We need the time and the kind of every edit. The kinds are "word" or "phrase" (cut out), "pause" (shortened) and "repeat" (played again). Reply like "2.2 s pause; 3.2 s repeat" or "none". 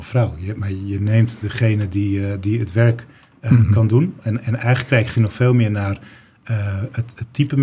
none